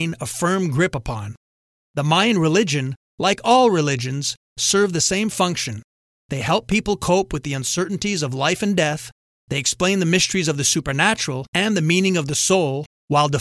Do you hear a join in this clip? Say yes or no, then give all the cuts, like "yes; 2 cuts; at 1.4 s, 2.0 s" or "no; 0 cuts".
no; 0 cuts